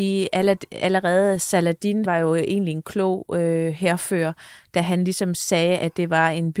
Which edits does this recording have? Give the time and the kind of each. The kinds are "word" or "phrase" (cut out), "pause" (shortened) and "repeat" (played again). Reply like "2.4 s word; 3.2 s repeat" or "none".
2.0 s word